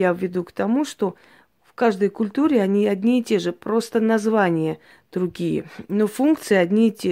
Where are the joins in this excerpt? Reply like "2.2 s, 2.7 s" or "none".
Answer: none